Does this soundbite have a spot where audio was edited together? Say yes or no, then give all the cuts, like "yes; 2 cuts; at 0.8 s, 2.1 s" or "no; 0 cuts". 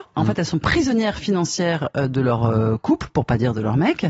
no; 0 cuts